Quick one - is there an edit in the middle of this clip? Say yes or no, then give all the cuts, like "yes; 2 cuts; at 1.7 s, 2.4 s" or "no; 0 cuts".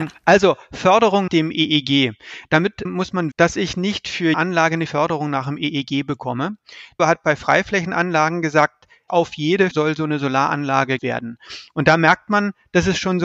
yes; 9 cuts; at 1.3 s, 2.8 s, 3.3 s, 4.3 s, 4.9 s, 7.0 s, 9.1 s, 9.7 s, 11.0 s